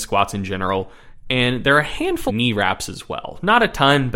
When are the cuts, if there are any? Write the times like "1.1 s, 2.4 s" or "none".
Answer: 2.3 s